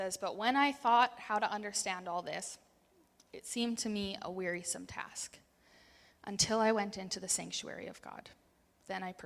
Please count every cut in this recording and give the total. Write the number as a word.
zero